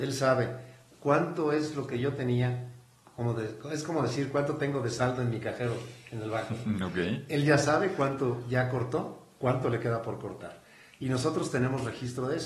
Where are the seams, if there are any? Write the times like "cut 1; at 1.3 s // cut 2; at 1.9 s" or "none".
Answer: none

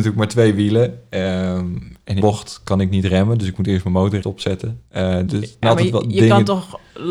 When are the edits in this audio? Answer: cut 1; at 2.2 s // cut 2; at 4.2 s // cut 3; at 5.3 s // cut 4; at 5.6 s

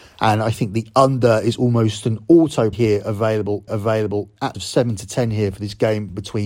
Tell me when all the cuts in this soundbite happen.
cut 1; at 2.7 s // cut 2; at 3.7 s // cut 3; at 4.5 s

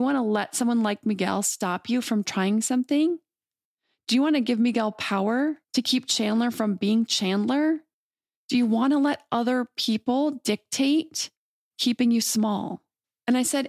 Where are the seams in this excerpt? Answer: cut 1; at 5.6 s

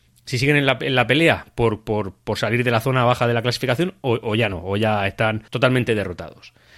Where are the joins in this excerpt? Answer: cut 1; at 5.5 s

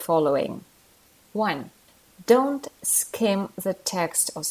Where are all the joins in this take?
none

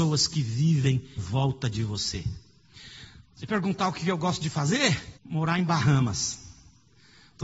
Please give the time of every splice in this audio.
cut 1; at 1.2 s // cut 2; at 3.3 s // cut 3; at 5.2 s

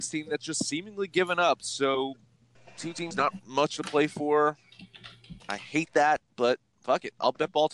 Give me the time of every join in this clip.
cut 1; at 2.6 s // cut 2; at 5.4 s

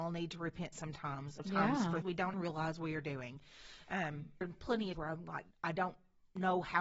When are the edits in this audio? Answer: cut 1; at 1.4 s // cut 2; at 2.0 s // cut 3; at 2.3 s // cut 4; at 4.4 s // cut 5; at 4.9 s // cut 6; at 5.5 s

